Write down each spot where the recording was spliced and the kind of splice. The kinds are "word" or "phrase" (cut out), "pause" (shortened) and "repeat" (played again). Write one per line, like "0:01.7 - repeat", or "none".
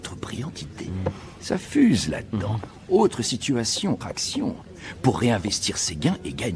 0:04.0 - word